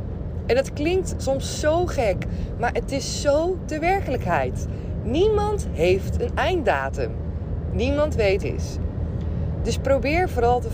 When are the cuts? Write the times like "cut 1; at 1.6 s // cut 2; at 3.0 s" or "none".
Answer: cut 1; at 8.4 s